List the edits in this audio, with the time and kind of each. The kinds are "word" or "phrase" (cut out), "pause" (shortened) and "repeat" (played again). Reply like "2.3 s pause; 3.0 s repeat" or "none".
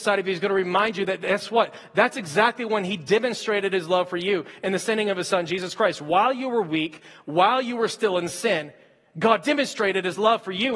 none